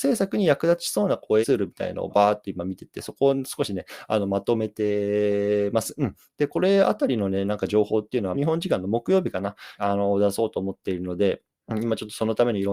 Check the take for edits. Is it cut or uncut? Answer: cut